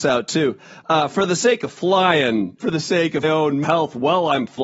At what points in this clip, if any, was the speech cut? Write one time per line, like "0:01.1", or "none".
0:02.6
0:03.2
0:03.6

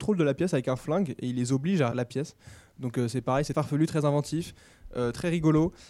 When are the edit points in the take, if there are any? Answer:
0:01.9
0:03.5

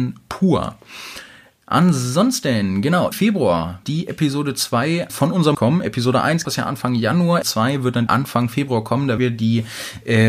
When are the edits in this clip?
0:03.1
0:03.8
0:05.1
0:05.5
0:06.4
0:07.4
0:08.1
0:09.2

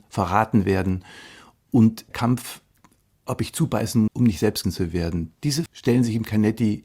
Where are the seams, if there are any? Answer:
0:02.1
0:04.1
0:04.6
0:05.7

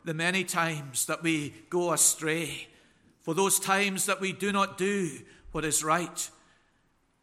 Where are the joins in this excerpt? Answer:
none

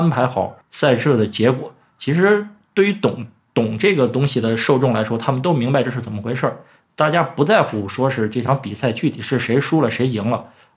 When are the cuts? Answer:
none

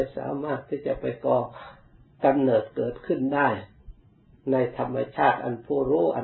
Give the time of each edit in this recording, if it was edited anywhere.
none

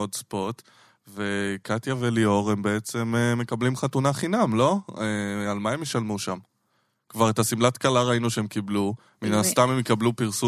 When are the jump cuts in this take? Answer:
none

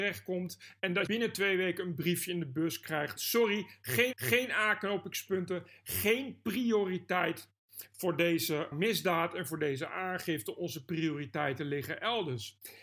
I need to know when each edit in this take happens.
0:01.1
0:03.2
0:04.1
0:08.7

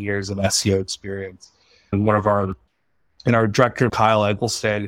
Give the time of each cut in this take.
0:03.9

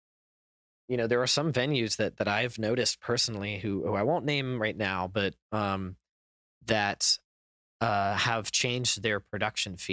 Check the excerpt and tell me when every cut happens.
none

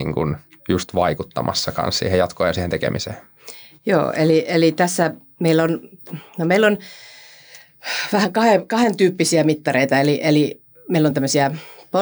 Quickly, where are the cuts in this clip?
none

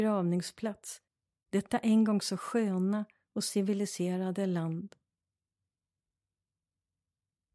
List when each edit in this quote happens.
none

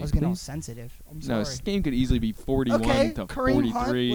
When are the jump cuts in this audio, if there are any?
0:01.6

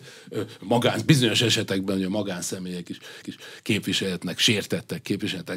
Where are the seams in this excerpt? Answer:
0:03.2

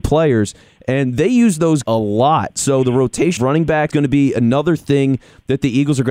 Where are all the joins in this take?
0:01.8
0:03.4
0:03.9

